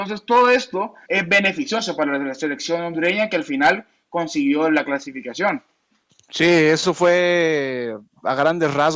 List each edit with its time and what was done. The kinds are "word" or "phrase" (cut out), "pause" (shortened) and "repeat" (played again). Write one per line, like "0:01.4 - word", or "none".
0:01.1 - word